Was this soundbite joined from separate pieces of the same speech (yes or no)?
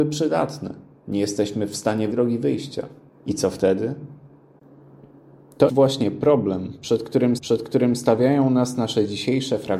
yes